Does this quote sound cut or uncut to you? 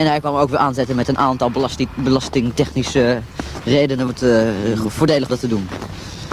cut